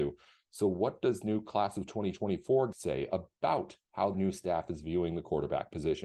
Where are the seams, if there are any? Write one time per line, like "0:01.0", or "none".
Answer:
0:01.2
0:02.7
0:04.1